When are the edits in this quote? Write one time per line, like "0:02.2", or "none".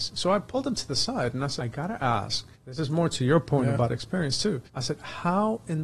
0:01.6
0:02.5
0:04.7